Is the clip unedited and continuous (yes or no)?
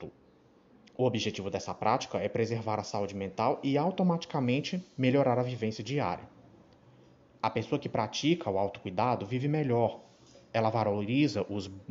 yes